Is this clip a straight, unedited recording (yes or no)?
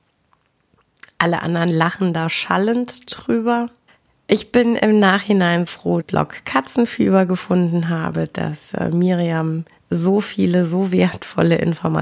no